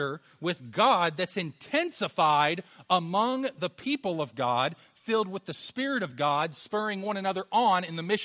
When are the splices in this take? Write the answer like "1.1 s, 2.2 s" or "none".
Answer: none